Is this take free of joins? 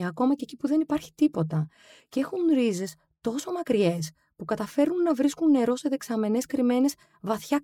yes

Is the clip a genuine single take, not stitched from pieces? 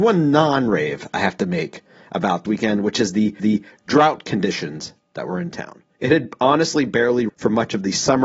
no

